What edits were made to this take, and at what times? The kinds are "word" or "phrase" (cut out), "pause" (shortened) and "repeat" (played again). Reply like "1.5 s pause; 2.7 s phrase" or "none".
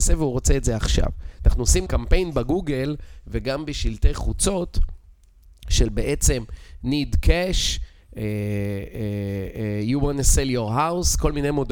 1.9 s word